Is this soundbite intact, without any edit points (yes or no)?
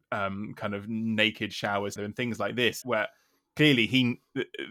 no